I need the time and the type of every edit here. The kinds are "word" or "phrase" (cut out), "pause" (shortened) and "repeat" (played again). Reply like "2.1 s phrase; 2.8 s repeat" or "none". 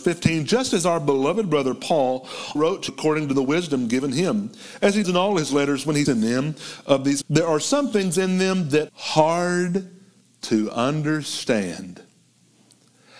2.6 s word; 2.9 s word; 5.0 s word; 6.1 s word; 7.2 s word; 8.9 s word